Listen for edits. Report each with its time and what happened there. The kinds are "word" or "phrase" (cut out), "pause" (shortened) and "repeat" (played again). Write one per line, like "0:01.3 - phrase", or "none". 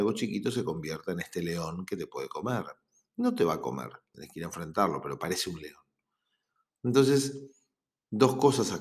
none